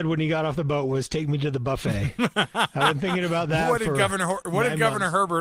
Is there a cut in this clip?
no; 0 cuts

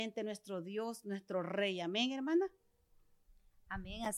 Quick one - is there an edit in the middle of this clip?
no; 0 cuts

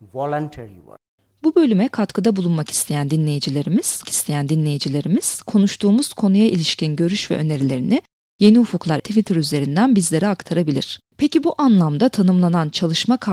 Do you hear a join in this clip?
yes; 3 cuts; at 4.0 s, 9.0 s, 11.1 s

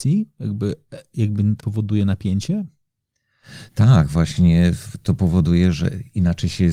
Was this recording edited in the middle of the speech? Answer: yes; 1 cut; at 1.6 s

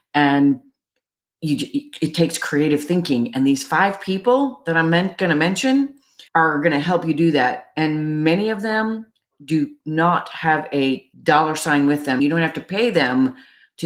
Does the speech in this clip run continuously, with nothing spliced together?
no; 3 cuts; at 6.3 s, 11.1 s, 12.2 s

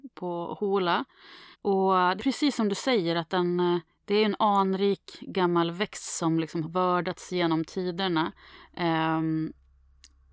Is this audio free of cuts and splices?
no; 4 cuts; at 1.5 s, 2.2 s, 3.9 s, 6.6 s

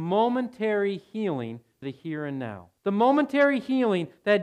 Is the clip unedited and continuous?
no; 2 cuts; at 1.8 s, 2.8 s

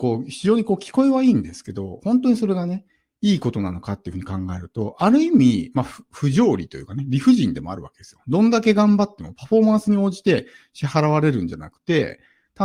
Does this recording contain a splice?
no; 0 cuts

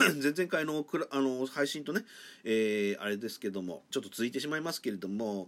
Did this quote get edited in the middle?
yes; 1 cut; at 3.9 s

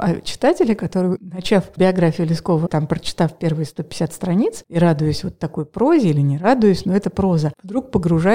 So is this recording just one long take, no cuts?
yes; 0 cuts

